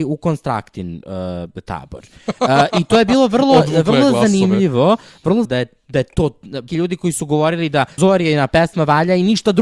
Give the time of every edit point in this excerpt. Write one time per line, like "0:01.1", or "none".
0:05.4
0:06.7
0:08.0